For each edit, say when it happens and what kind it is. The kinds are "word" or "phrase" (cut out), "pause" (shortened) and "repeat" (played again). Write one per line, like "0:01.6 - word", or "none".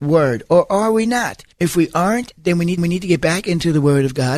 0:01.5 - pause
0:02.8 - repeat

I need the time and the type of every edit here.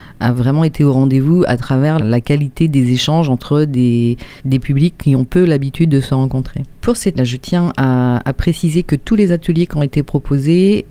0:02.0 - word
0:04.4 - pause
0:07.1 - phrase

